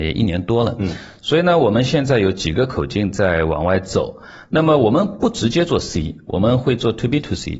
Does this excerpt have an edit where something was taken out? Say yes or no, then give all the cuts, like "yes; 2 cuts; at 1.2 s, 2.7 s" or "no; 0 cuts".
no; 0 cuts